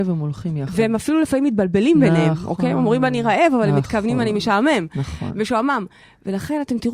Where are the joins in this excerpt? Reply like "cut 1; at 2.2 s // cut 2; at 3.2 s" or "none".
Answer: none